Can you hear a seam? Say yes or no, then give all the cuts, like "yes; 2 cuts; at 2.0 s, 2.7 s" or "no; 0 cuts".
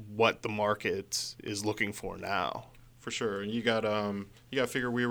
no; 0 cuts